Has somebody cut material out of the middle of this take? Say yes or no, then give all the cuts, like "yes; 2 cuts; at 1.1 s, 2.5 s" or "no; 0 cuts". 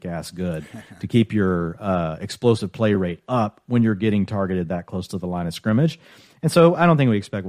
no; 0 cuts